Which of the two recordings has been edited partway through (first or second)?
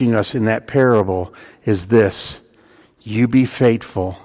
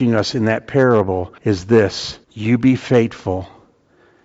second